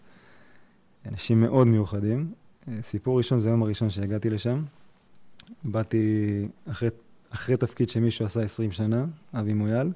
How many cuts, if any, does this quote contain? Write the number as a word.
zero